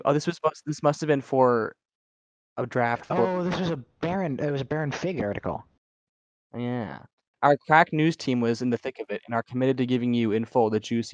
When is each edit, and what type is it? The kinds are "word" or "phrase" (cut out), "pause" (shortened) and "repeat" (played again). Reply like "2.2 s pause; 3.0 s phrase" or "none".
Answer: none